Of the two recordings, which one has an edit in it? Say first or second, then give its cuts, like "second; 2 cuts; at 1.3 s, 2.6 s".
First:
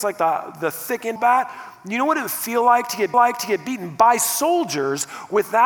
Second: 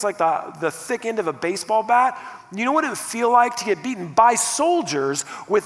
first; 2 cuts; at 1.2 s, 3.1 s